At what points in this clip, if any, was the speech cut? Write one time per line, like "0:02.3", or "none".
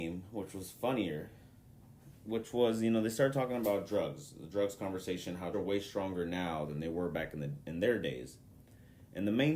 0:02.2
0:05.5